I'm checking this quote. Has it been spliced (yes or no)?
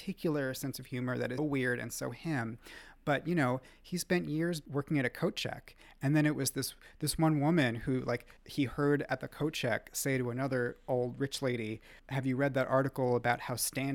yes